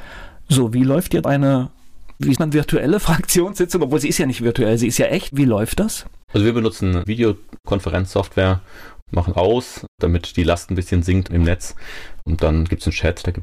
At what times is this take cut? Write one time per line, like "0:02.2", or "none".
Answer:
0:01.2
0:02.4
0:06.2
0:09.3
0:09.9